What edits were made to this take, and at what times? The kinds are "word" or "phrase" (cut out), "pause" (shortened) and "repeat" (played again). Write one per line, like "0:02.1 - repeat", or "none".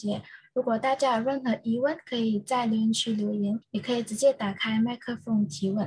0:03.6 - pause